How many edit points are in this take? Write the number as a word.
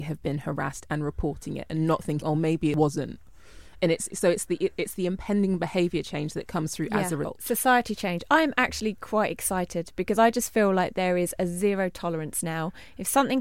zero